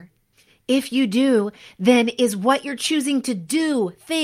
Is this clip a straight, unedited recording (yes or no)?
yes